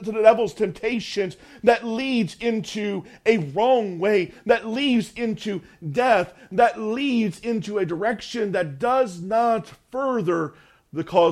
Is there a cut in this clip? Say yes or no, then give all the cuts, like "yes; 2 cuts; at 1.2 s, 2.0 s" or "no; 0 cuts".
no; 0 cuts